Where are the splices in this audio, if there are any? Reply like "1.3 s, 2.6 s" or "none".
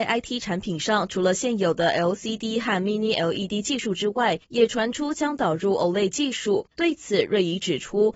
4.4 s, 6.7 s